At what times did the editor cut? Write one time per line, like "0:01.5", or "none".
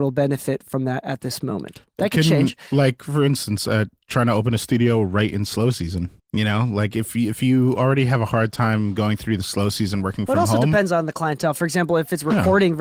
0:06.2